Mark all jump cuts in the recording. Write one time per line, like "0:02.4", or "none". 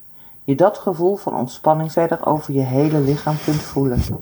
0:01.9